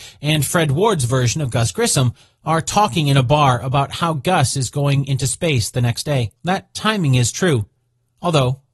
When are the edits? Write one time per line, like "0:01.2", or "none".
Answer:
0:06.4